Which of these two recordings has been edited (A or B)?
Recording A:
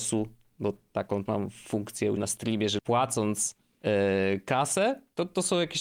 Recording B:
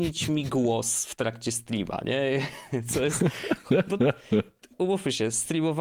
A